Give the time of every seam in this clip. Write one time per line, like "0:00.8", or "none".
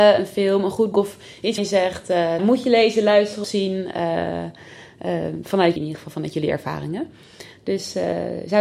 0:00.9
0:01.6
0:02.4
0:03.4
0:05.8